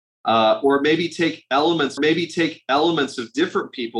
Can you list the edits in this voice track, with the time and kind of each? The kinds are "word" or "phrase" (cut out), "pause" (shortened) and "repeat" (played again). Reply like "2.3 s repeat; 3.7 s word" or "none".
2.0 s repeat